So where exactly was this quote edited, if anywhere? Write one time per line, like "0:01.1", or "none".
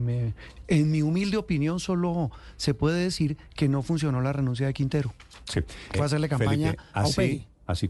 0:05.9

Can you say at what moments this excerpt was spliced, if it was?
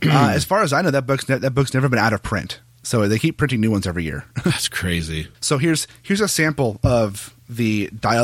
0:05.3

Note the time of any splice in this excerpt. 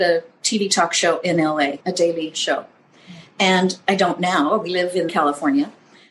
0:01.8
0:05.1

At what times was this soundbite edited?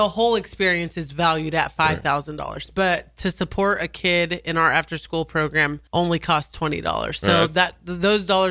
0:05.9

